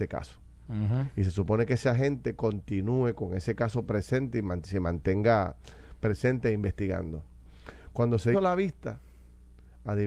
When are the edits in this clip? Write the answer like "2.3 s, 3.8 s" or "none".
8.3 s